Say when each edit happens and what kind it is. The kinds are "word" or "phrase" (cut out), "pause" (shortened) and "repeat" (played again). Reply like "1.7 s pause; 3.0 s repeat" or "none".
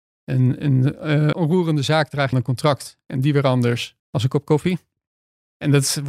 1.3 s word; 2.3 s phrase; 4.0 s pause